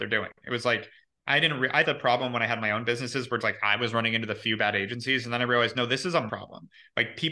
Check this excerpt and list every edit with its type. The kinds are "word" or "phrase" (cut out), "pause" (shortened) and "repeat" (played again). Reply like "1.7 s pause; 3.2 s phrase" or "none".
1.8 s word; 3.4 s word; 6.3 s word